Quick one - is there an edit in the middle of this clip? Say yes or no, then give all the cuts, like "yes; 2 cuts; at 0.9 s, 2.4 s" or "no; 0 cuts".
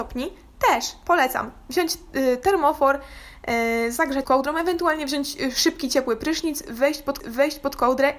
yes; 2 cuts; at 4.2 s, 7.2 s